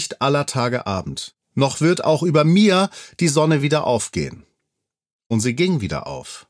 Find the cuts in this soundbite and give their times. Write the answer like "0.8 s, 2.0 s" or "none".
none